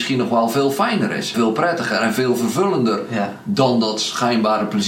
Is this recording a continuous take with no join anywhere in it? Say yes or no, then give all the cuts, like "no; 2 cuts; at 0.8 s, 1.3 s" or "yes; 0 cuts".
no; 1 cut; at 1.3 s